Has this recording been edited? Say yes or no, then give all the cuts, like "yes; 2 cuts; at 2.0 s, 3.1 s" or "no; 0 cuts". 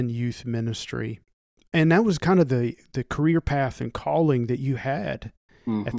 yes; 1 cut; at 1.6 s